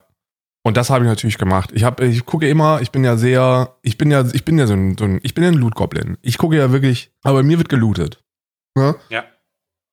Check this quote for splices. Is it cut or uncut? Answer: cut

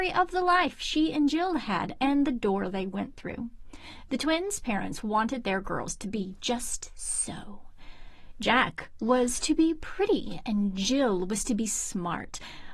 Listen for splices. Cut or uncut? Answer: uncut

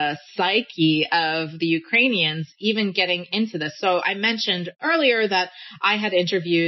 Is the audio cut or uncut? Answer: uncut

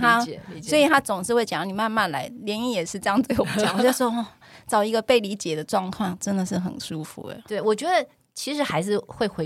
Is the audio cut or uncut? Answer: uncut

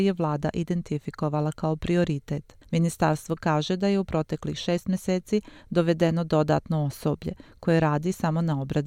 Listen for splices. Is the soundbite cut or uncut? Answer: cut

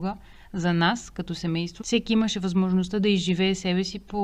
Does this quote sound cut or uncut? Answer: cut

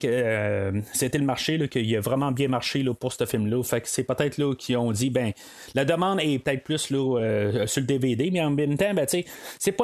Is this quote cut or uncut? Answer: uncut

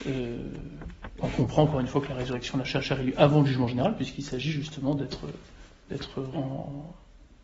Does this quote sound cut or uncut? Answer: cut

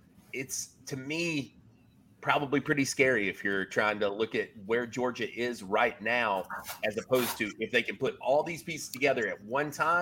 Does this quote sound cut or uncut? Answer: uncut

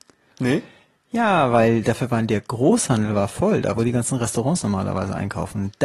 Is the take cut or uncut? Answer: uncut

